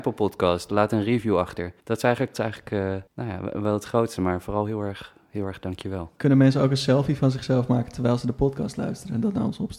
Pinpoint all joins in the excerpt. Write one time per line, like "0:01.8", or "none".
0:01.8
0:02.3
0:03.1